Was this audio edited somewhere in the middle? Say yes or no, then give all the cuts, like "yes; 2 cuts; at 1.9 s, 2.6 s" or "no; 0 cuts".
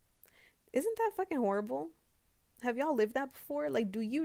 no; 0 cuts